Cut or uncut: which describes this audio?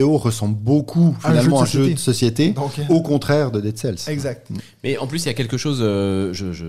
uncut